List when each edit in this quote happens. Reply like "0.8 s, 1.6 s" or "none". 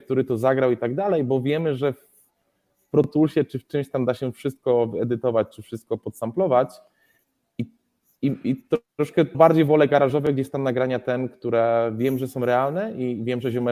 9.3 s